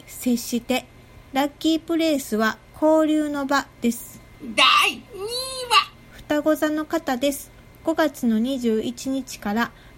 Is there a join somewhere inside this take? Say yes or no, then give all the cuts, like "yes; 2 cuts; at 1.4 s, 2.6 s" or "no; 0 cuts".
yes; 2 cuts; at 1.3 s, 5.1 s